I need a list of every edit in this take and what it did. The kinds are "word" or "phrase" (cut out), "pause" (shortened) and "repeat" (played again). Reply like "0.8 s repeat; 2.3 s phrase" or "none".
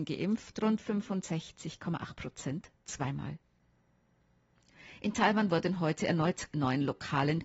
6.5 s word